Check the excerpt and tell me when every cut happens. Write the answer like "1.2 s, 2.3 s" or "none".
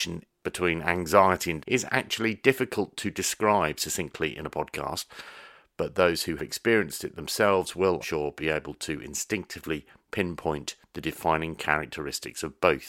1.6 s, 6.4 s, 8.0 s